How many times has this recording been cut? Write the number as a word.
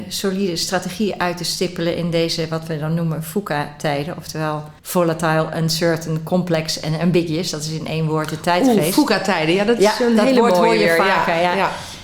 one